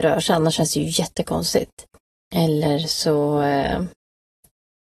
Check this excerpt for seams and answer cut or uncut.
cut